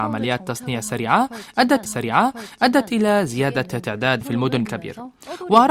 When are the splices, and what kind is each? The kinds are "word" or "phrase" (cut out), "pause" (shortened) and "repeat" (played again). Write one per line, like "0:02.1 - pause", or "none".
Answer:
0:01.8 - repeat
0:04.2 - word
0:04.6 - word